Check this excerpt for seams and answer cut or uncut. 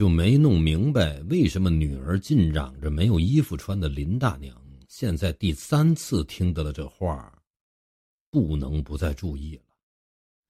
uncut